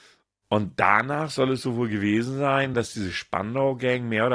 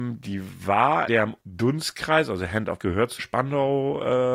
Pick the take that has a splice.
second; 4 cuts; at 1.1 s, 1.4 s, 2.8 s, 3.2 s

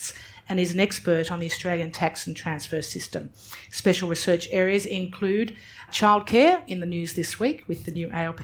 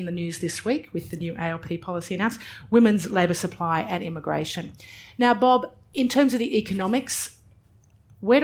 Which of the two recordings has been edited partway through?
first; 1 cut; at 5.9 s

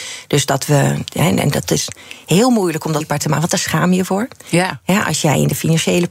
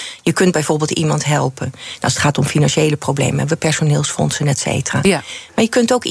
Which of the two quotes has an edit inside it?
first; 1 cut; at 3.0 s

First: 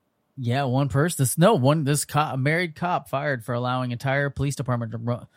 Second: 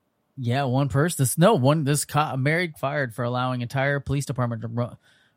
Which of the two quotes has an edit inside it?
second; 1 cut; at 2.7 s

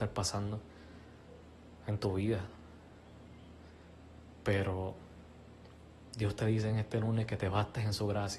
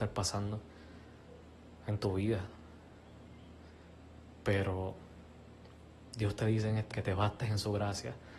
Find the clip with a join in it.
second; 1 cut; at 6.9 s

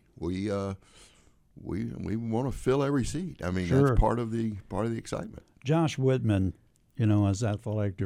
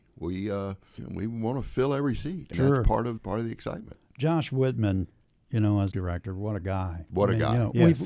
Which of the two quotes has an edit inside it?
second; 4 cuts; at 1.0 s, 2.5 s, 3.2 s, 5.9 s

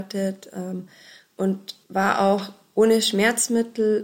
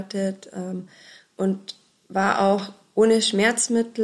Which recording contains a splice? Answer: first; 1 cut; at 1.8 s

